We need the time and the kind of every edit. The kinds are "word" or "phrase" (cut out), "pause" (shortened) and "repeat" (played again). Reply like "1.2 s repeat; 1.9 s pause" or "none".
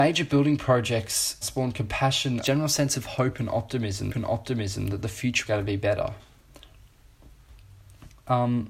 1.4 s word; 2.4 s phrase; 4.1 s repeat; 5.5 s word